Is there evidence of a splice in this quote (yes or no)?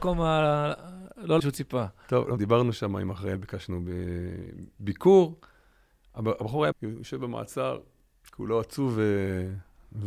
yes